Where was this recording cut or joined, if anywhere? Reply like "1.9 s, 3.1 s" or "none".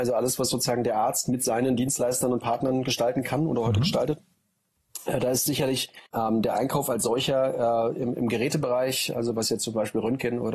6.1 s